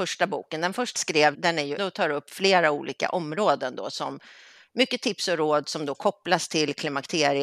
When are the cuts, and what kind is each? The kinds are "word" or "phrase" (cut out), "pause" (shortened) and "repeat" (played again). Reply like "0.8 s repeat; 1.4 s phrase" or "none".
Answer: 1.0 s word; 1.3 s word; 1.8 s word